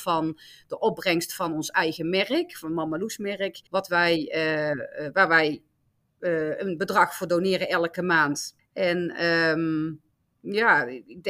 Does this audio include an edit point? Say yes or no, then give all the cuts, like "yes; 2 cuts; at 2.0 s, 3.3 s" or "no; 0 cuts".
yes; 2 cuts; at 3.7 s, 8.6 s